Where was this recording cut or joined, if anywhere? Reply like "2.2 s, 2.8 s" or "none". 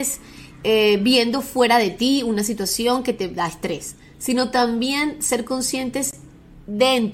none